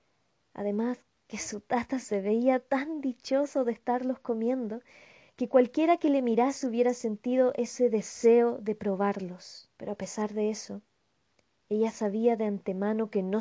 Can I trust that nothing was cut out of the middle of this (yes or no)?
no